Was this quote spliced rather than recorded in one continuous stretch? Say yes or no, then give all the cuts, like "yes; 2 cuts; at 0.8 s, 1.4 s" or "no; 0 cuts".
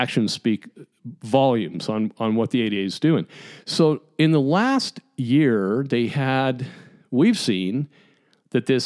no; 0 cuts